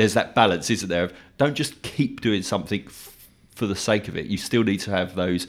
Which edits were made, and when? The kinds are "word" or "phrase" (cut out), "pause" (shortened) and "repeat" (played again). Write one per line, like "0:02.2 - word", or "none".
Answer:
none

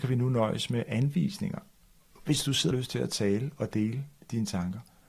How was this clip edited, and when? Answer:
0:02.7 - word

